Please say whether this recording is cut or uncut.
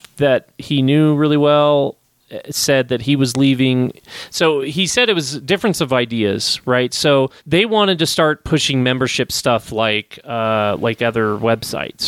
cut